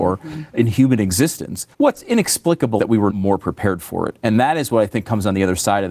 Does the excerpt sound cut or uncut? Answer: cut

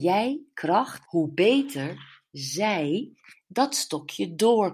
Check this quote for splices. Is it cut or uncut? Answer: cut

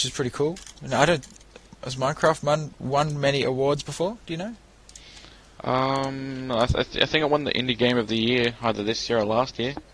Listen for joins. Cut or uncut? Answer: uncut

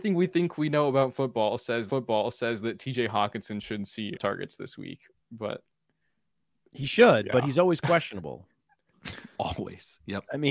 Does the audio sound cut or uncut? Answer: cut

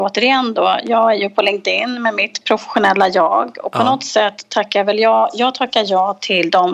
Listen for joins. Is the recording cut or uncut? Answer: uncut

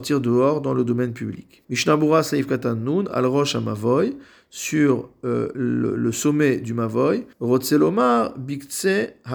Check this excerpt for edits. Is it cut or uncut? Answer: cut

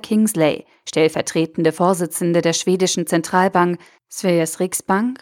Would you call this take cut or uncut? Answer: uncut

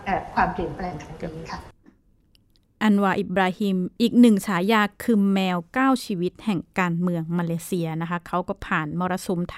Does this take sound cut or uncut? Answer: uncut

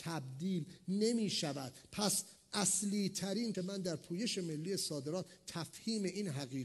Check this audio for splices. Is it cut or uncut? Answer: cut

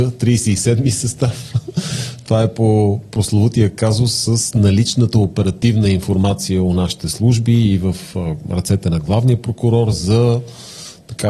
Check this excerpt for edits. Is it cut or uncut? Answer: uncut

